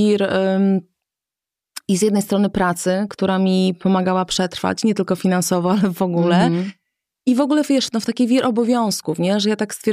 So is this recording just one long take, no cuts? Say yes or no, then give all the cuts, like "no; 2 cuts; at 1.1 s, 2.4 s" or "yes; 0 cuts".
yes; 0 cuts